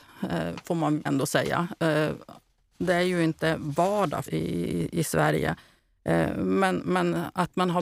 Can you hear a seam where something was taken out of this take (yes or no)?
yes